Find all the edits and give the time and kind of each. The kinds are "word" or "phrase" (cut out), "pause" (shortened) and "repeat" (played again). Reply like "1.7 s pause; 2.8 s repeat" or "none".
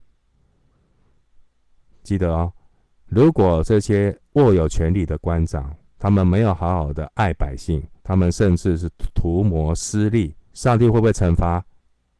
8.0 s pause; 10.5 s pause

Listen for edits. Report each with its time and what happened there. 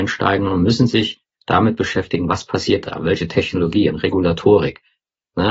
none

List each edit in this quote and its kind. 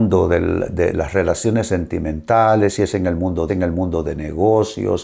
0.9 s word; 3.5 s repeat

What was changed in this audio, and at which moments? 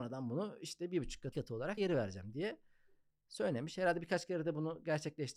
1.3 s word; 1.8 s word

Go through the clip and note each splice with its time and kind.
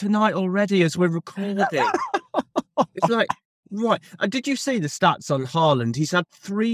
none

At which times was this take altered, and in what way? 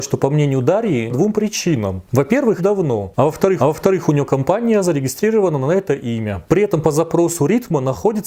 1.1 s phrase; 2.6 s phrase; 3.6 s repeat

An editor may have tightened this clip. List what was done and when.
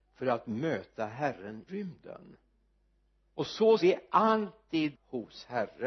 1.7 s word; 3.8 s word; 4.9 s word

